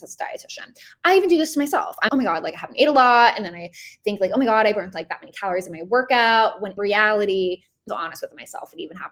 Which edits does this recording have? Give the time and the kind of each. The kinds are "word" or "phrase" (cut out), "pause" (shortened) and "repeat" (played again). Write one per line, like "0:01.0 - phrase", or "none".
0:02.1 - word
0:06.8 - word
0:07.9 - phrase